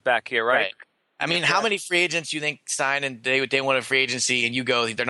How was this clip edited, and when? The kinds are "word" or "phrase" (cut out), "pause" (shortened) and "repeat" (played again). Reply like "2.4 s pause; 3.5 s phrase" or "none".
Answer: none